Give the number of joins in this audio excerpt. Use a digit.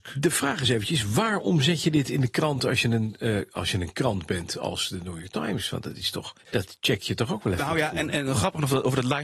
1